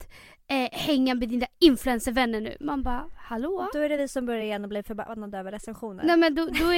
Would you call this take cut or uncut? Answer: uncut